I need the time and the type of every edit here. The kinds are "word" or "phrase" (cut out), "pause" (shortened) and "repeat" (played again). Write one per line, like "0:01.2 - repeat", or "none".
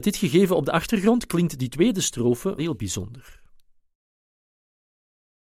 0:02.6 - word